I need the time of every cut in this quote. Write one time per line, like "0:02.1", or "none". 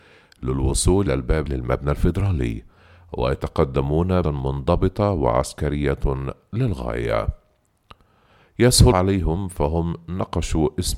0:01.1
0:01.5
0:04.2
0:08.9